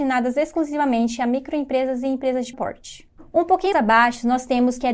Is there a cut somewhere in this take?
yes; 2 cuts; at 2.5 s, 3.7 s

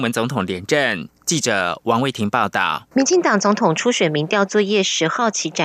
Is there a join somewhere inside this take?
yes; 1 cut; at 2.9 s

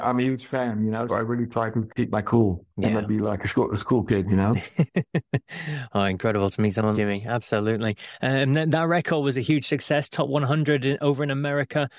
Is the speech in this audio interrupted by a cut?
yes; 3 cuts; at 1.1 s, 2.7 s, 6.9 s

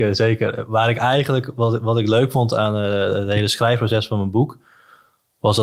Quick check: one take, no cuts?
yes; 0 cuts

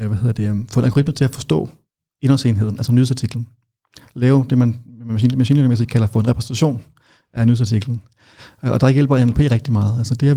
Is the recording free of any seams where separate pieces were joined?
yes; 0 cuts

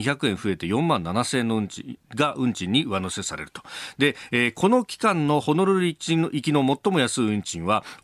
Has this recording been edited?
no; 0 cuts

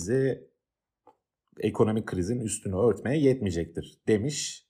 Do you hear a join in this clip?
no; 0 cuts

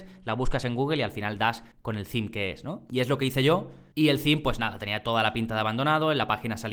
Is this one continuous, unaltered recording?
no; 1 cut; at 1.7 s

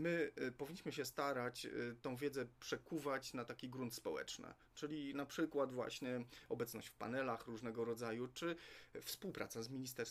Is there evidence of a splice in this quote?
no; 0 cuts

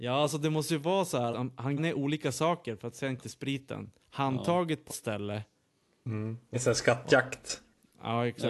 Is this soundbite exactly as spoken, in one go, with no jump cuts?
no; 5 cuts; at 1.3 s, 1.8 s, 3.2 s, 4.9 s, 6.5 s

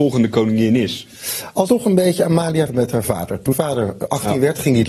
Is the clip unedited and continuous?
no; 3 cuts; at 1.7 s, 2.7 s, 3.5 s

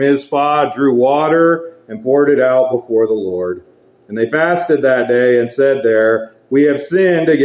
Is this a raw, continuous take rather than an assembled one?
yes; 0 cuts

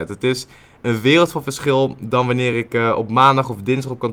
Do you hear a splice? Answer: no; 0 cuts

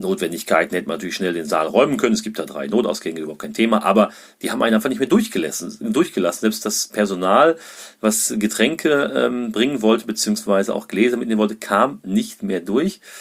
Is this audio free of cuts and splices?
yes; 0 cuts

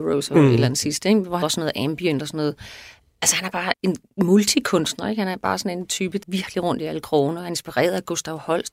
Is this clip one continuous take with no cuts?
no; 3 cuts; at 1.4 s, 3.7 s, 6.2 s

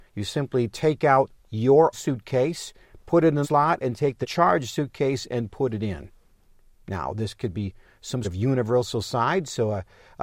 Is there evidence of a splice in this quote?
yes; 4 cuts; at 1.9 s, 3.4 s, 4.2 s, 8.2 s

